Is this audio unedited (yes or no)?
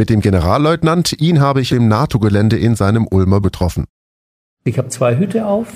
no